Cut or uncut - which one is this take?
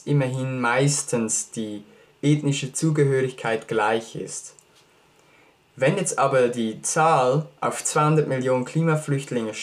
uncut